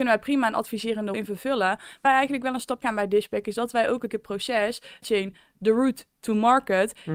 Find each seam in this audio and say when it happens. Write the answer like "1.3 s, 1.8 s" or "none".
1.1 s, 2.0 s, 2.8 s, 4.1 s, 5.0 s